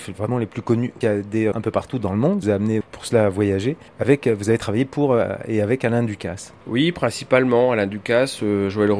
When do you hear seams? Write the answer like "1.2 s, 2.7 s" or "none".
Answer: 1.0 s, 1.5 s, 2.4 s, 2.8 s, 3.9 s, 6.6 s